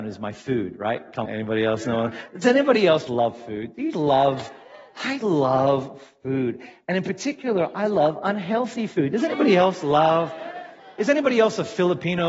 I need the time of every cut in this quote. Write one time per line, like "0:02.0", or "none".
0:01.3
0:03.1
0:03.9
0:05.2
0:10.8